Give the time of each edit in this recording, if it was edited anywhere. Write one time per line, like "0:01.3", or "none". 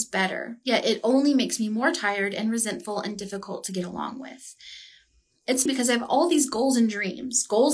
0:05.7